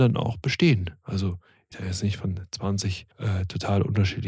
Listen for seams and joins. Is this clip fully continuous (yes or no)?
no